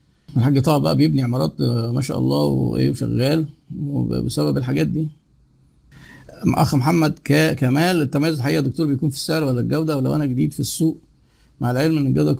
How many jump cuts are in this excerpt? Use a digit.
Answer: 0